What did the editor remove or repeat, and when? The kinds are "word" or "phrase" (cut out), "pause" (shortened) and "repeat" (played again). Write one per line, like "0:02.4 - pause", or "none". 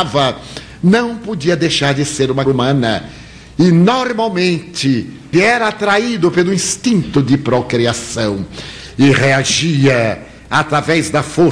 0:02.5 - word
0:05.3 - word

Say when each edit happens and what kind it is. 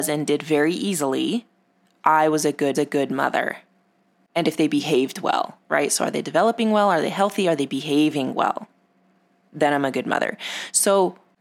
0:02.7 - repeat
0:05.6 - pause

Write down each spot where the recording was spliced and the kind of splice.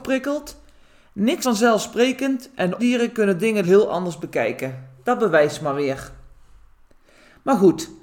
0:01.4 - word
0:02.8 - word
0:03.6 - word

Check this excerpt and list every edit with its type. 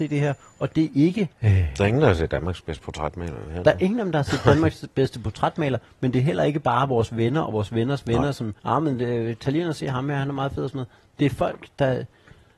0:01.3 - pause
0:08.6 - pause

